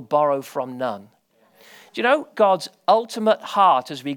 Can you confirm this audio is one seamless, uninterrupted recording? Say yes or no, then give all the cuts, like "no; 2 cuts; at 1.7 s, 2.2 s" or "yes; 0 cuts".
yes; 0 cuts